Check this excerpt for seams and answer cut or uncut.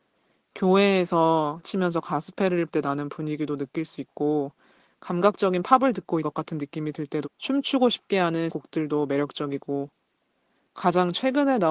cut